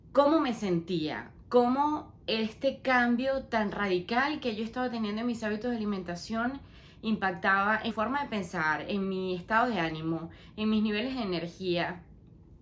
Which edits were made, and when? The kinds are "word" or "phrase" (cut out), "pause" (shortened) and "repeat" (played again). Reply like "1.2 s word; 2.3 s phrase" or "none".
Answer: 7.9 s word